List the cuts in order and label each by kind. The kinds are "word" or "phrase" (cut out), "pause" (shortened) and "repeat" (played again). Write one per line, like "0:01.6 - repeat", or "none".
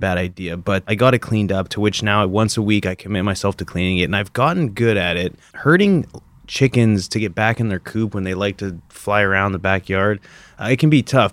none